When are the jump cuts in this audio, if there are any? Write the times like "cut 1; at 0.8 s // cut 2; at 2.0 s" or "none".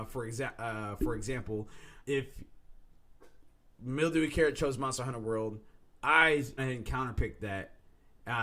cut 1; at 2.1 s // cut 2; at 6.6 s